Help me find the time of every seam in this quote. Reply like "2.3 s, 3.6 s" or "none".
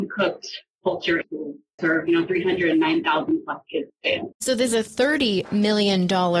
1.2 s, 1.8 s, 3.9 s, 4.3 s, 4.7 s